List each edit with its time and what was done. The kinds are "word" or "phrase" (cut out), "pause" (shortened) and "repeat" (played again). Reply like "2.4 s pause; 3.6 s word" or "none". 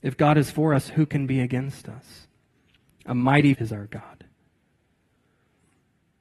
2.5 s pause; 3.5 s word

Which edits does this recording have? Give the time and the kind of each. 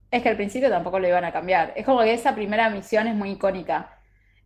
none

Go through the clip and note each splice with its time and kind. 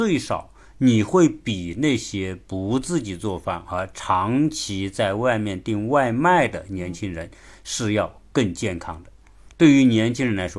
none

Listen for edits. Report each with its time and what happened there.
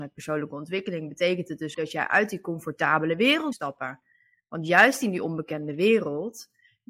1.7 s word; 3.5 s word

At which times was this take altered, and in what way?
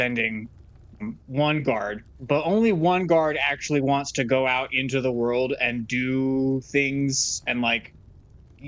2.1 s pause

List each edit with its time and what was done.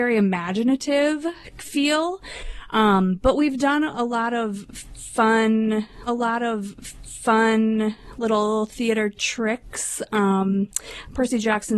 6.1 s repeat

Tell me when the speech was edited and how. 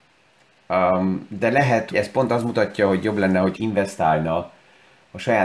1.9 s word; 3.6 s phrase

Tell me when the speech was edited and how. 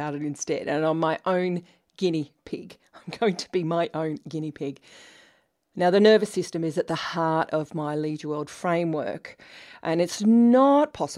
none

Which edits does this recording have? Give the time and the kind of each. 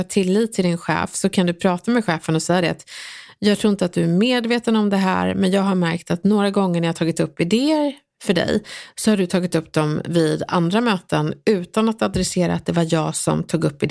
none

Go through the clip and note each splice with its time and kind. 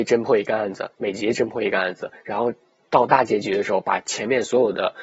none

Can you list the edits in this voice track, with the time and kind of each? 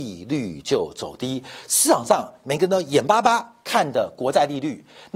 none

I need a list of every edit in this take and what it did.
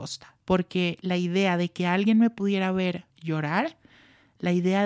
3.1 s pause

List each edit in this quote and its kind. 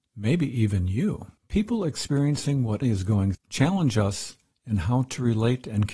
1.4 s pause; 2.8 s word; 3.3 s word

